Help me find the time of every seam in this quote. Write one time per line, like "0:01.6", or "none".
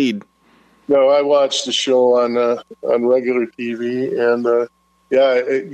none